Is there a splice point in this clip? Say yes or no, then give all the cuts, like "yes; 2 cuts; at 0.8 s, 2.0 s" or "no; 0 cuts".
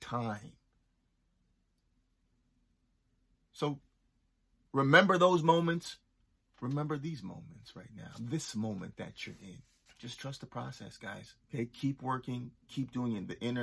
yes; 3 cuts; at 6.4 s, 9.9 s, 11.4 s